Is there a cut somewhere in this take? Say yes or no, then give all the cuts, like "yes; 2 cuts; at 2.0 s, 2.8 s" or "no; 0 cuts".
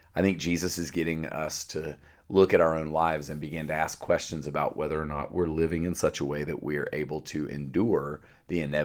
no; 0 cuts